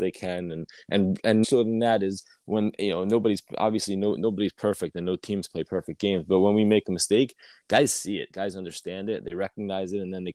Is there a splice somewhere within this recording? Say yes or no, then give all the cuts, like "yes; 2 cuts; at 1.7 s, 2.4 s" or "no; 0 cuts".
yes; 1 cut; at 1.4 s